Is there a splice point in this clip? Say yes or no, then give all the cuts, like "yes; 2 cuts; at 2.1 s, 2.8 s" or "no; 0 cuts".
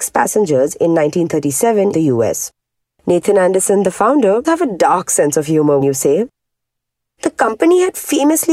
yes; 3 cuts; at 1.9 s, 4.4 s, 5.8 s